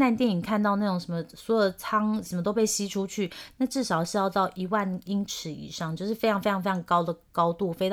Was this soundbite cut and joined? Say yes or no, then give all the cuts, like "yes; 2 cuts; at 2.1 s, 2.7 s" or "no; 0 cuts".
yes; 1 cut; at 2.3 s